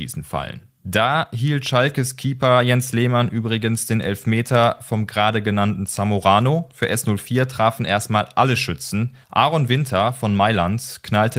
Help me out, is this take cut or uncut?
cut